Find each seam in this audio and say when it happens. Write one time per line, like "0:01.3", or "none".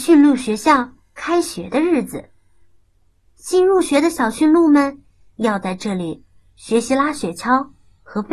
none